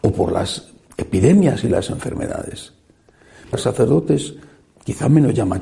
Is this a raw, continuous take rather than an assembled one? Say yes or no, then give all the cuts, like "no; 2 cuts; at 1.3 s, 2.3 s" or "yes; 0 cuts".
no; 1 cut; at 3.5 s